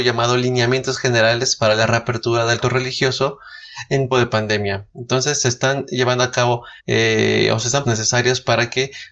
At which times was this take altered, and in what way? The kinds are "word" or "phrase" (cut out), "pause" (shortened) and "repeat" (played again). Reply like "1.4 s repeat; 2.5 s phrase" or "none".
2.6 s word; 4.1 s word; 6.8 s pause; 7.8 s phrase